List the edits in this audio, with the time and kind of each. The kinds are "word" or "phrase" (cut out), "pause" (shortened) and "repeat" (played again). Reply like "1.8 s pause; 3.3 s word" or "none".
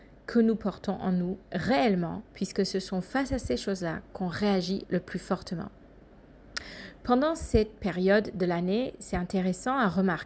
2.3 s pause